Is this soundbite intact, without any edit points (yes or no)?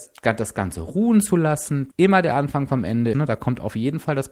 no